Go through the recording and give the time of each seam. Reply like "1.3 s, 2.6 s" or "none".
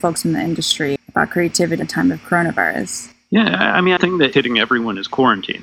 1.0 s, 1.8 s, 4.0 s, 4.3 s

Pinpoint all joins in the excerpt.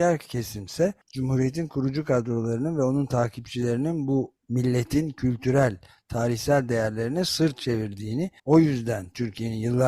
1.0 s, 8.4 s

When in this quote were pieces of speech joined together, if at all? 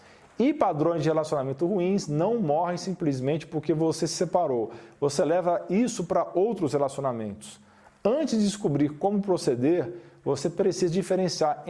none

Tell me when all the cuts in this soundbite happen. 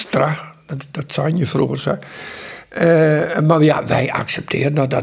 none

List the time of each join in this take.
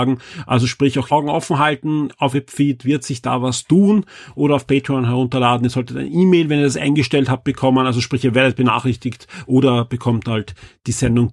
1.1 s, 2.3 s

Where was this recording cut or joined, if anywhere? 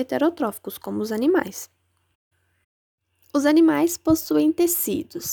none

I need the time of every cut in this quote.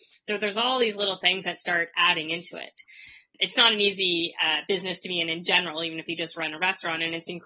none

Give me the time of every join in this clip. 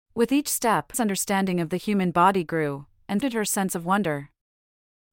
0.9 s, 3.2 s

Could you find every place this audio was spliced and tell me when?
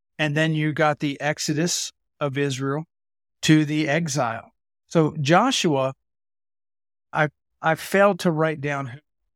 none

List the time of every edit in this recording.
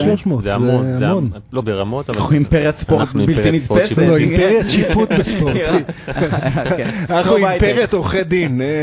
1.6 s

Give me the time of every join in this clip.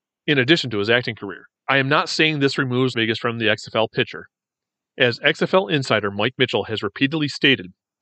1.6 s, 2.9 s

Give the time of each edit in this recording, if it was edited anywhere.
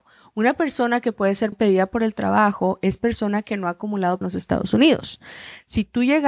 1.5 s, 4.2 s

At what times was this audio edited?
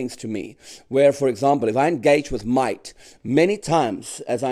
none

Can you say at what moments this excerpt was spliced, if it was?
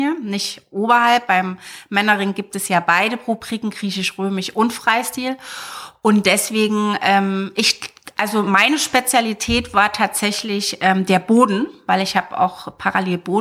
none

